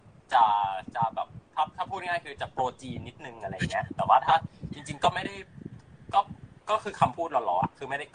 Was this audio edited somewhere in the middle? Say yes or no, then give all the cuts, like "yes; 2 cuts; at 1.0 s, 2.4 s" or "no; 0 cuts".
no; 0 cuts